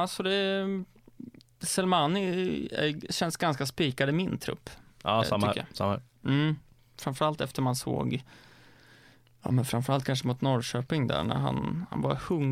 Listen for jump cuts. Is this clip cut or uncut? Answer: uncut